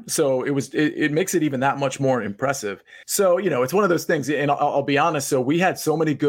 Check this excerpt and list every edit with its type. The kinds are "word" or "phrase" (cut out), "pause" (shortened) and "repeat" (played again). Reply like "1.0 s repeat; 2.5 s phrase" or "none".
3.0 s pause

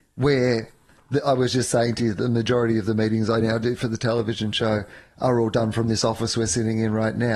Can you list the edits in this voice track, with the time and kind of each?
none

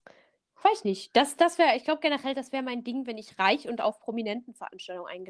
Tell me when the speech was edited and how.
1.8 s phrase

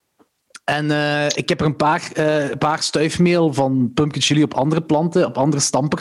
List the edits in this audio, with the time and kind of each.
none

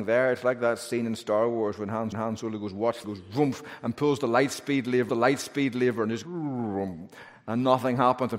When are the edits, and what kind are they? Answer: 2.1 s repeat; 3.0 s phrase; 5.1 s repeat; 6.2 s word

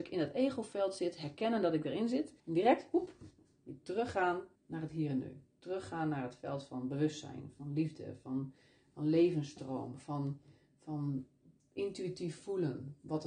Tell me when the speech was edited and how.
2.4 s pause; 4.5 s pause

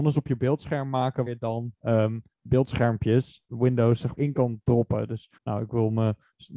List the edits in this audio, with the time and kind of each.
1.3 s word; 1.8 s pause; 3.5 s phrase; 4.1 s word; 5.4 s pause

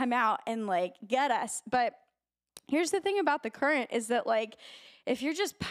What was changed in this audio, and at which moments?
none

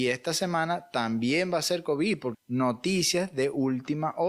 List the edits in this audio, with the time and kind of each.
2.3 s word

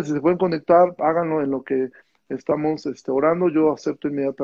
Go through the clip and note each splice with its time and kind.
none

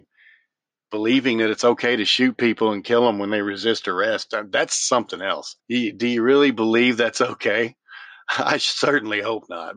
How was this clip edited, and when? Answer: 5.6 s pause

